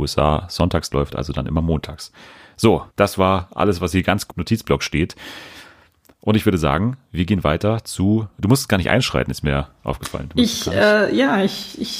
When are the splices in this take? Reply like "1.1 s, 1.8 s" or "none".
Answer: 2.9 s, 4.3 s